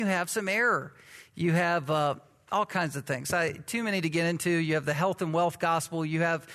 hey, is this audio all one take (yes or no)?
yes